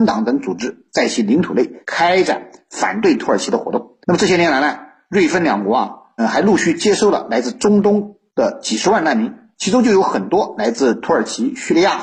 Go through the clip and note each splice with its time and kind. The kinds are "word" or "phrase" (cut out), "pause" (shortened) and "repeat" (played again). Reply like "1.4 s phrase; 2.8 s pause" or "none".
1.8 s pause; 4.0 s pause; 6.2 s word

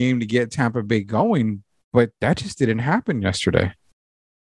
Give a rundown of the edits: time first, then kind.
none

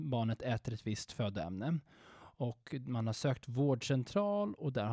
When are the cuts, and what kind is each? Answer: none

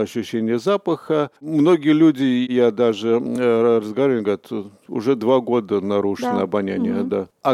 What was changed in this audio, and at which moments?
1.4 s pause

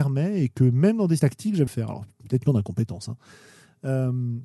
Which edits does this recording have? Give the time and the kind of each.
1.2 s phrase; 1.7 s phrase; 2.5 s word

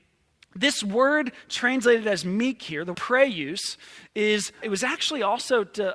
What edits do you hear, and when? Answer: 2.9 s word; 4.6 s word

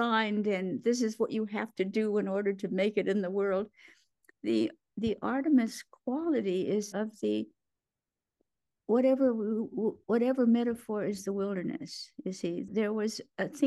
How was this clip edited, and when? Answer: 6.9 s word; 12.7 s word

